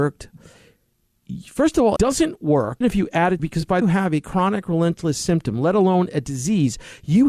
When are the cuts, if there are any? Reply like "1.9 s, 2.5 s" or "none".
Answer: 2.0 s, 2.8 s, 3.4 s, 3.8 s